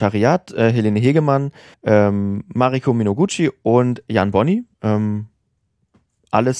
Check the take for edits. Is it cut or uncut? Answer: cut